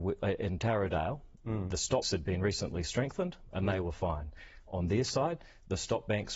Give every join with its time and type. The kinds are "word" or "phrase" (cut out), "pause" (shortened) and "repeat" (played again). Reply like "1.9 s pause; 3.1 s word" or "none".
2.0 s word